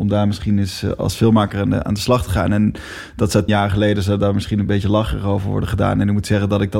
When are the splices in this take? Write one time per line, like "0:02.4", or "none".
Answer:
0:03.5